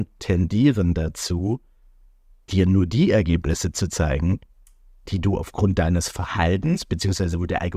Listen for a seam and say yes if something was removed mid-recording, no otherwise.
no